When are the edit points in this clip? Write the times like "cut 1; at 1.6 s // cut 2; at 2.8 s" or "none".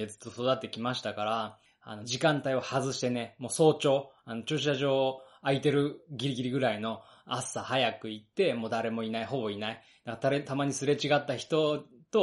none